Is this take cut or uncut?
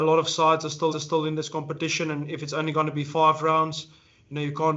cut